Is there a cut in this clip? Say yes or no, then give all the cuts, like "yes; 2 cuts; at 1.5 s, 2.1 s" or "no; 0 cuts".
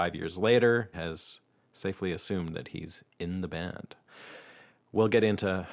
yes; 1 cut; at 0.9 s